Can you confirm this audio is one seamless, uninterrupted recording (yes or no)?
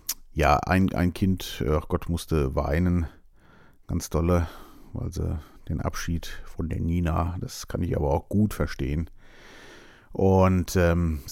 yes